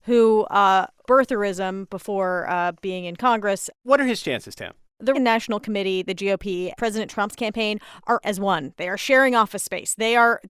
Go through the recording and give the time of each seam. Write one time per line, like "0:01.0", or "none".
0:01.1
0:05.1
0:06.8
0:08.2